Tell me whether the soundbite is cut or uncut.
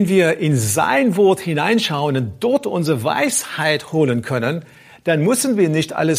uncut